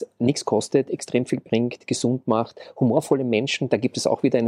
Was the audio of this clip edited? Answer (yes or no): no